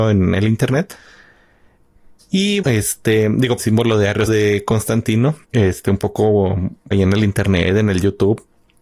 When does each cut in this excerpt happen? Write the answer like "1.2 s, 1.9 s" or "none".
2.6 s, 3.6 s, 4.3 s, 5.4 s, 6.9 s